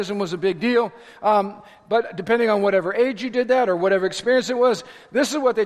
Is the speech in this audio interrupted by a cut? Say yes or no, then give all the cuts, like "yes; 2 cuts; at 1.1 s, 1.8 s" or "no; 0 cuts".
no; 0 cuts